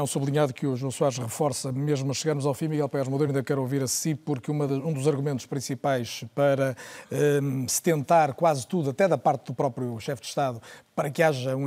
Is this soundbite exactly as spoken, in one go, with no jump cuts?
yes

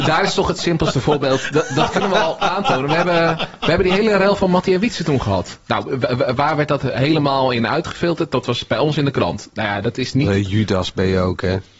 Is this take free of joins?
yes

